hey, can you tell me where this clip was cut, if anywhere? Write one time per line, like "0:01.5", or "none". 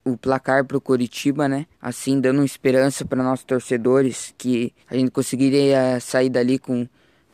0:01.7
0:04.8

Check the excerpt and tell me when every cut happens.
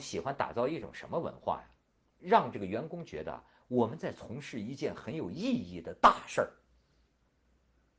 none

